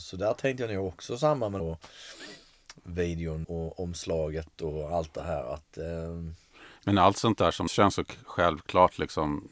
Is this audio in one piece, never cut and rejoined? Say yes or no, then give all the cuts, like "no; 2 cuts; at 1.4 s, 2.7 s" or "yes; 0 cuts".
no; 4 cuts; at 1.6 s, 2.8 s, 3.4 s, 7.7 s